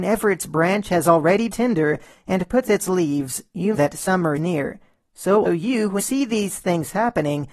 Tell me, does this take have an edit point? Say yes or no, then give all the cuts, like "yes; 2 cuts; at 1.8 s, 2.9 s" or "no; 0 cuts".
yes; 6 cuts; at 1.5 s, 2.7 s, 3.7 s, 4.4 s, 5.5 s, 6.0 s